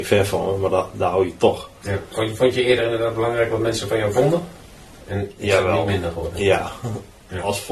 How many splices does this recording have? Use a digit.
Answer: 0